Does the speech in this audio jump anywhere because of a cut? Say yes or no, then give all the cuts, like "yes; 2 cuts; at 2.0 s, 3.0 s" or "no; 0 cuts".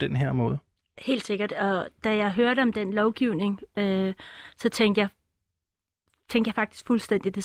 no; 0 cuts